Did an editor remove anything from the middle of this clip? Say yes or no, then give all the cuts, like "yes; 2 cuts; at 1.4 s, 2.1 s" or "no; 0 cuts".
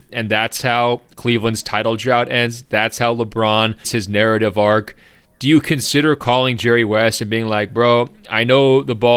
yes; 1 cut; at 3.8 s